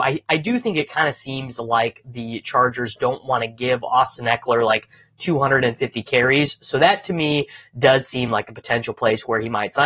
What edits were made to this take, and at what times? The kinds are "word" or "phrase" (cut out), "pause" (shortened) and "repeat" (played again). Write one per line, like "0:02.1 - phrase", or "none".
none